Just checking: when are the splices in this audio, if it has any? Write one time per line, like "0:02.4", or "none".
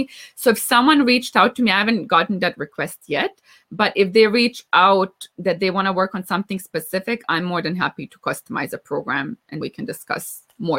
0:09.6